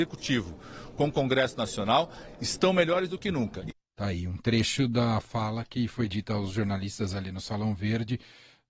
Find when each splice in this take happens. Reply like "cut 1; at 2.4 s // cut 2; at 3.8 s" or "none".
none